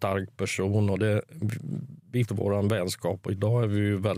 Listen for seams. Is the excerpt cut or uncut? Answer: cut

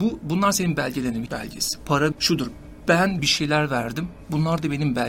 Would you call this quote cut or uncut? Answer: cut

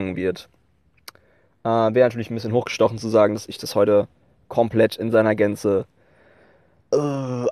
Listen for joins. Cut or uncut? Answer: uncut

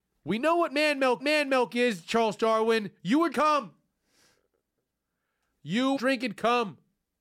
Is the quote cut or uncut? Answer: cut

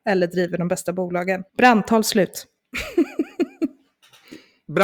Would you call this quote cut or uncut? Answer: cut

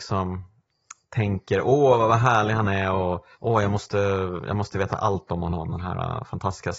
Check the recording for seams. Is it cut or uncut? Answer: cut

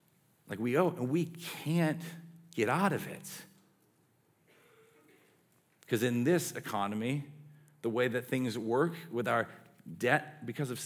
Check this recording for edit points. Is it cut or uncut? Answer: uncut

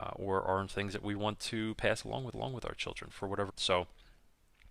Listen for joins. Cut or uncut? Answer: cut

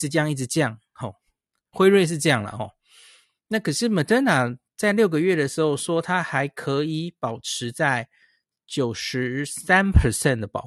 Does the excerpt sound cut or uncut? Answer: uncut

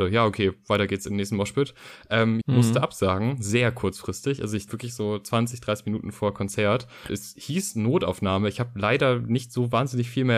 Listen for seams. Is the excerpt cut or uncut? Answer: cut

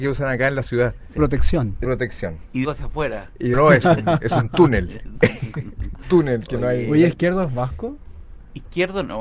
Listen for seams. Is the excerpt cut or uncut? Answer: cut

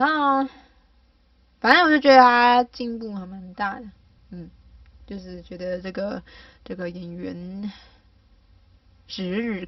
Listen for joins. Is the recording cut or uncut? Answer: uncut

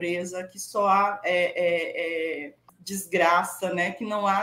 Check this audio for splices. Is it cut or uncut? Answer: uncut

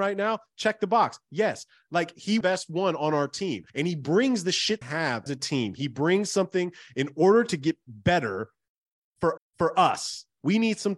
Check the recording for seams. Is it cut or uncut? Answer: cut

